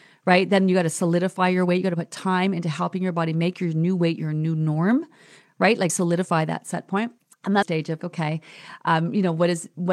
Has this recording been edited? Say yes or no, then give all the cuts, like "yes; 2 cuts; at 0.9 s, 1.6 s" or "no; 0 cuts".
yes; 4 cuts; at 5.9 s, 7.2 s, 7.6 s, 8.0 s